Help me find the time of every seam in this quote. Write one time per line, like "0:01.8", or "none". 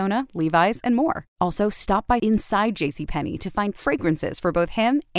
0:01.3
0:02.2
0:03.7